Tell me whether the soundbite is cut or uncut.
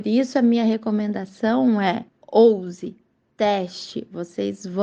cut